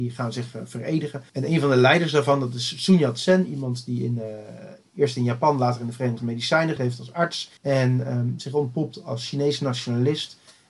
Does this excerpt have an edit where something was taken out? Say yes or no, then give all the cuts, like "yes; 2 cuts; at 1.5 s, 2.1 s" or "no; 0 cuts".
yes; 4 cuts; at 1.3 s, 6.2 s, 6.8 s, 7.6 s